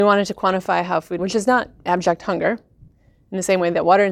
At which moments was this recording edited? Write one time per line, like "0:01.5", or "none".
0:01.2